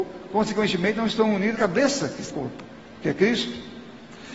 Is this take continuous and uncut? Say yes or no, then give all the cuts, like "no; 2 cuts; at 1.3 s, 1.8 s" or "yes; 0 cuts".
no; 2 cuts; at 1.5 s, 2.3 s